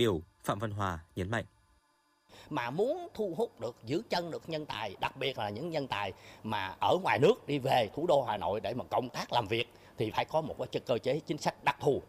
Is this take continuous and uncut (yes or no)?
yes